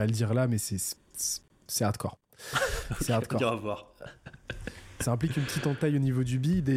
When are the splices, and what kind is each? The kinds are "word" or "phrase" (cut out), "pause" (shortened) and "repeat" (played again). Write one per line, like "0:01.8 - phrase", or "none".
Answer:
none